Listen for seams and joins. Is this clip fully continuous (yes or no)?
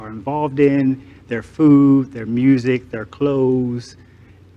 yes